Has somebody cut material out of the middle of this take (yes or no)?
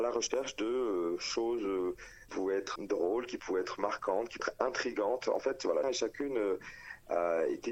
yes